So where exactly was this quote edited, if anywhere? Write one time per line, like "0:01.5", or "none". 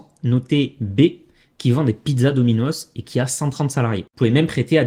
none